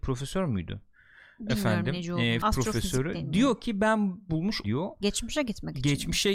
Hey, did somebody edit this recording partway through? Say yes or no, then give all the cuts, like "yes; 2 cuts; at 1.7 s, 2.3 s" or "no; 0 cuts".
yes; 3 cuts; at 2.4 s, 4.3 s, 4.6 s